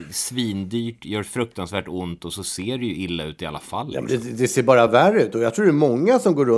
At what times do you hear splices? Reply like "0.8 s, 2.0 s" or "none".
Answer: none